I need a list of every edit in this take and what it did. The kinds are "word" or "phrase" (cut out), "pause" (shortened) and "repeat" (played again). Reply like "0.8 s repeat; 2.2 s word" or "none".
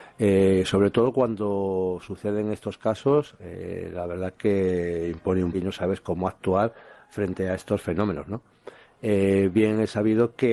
5.5 s word